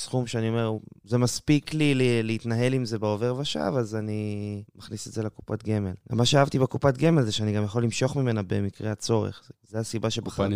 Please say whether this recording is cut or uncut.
cut